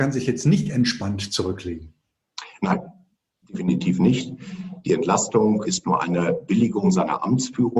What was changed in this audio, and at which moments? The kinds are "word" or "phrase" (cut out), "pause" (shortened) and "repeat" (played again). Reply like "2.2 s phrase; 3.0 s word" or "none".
5.6 s word